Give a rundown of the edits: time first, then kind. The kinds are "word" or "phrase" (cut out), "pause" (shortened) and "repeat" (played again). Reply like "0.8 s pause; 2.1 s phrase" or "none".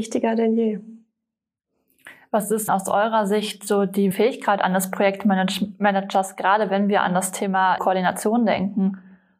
2.7 s word; 4.1 s word; 7.8 s word